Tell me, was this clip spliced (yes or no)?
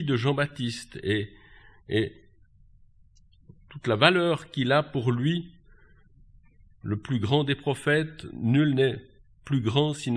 no